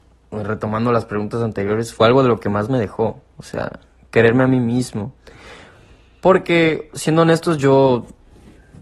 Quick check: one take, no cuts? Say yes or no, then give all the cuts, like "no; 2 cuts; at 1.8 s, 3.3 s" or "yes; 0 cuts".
yes; 0 cuts